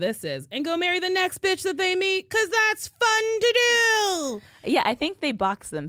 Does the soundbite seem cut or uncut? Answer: uncut